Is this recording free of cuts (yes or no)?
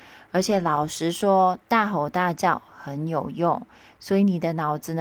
yes